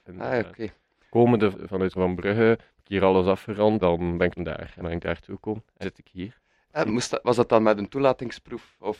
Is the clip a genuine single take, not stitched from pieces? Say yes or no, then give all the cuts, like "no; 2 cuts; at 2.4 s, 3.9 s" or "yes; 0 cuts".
no; 7 cuts; at 1.5 s, 2.0 s, 2.7 s, 3.8 s, 4.4 s, 4.8 s, 5.8 s